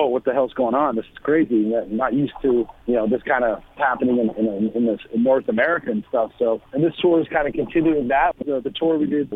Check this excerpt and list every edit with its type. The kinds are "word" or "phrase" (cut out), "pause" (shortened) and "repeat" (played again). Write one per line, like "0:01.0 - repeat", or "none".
0:03.8 - word
0:06.7 - pause
0:08.4 - word